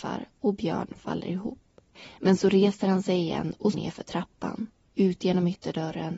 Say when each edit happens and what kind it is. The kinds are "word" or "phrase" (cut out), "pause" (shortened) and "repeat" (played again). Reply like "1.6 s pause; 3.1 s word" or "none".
3.7 s word